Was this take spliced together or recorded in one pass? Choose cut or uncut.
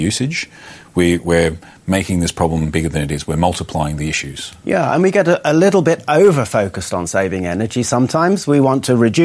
uncut